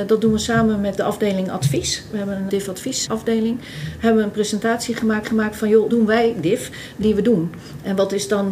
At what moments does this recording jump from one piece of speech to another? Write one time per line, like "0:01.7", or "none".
0:01.0
0:02.5
0:03.1
0:05.2
0:05.9
0:07.0